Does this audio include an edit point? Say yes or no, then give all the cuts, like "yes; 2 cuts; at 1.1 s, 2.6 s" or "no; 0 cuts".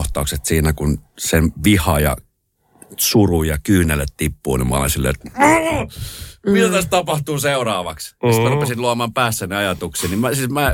no; 0 cuts